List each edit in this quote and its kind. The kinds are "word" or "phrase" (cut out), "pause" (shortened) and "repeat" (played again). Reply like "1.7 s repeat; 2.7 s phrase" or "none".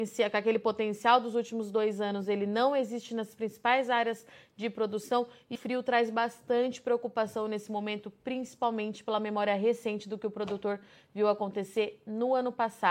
5.6 s word